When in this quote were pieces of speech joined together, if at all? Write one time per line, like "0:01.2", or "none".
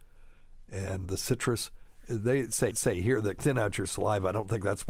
0:01.0
0:02.7
0:03.4